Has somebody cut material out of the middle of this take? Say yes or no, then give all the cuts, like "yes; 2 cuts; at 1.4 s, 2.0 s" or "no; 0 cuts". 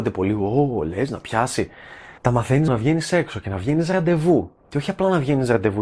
yes; 2 cuts; at 2.2 s, 2.7 s